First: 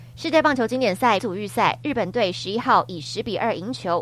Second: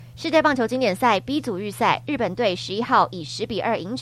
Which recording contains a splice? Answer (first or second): first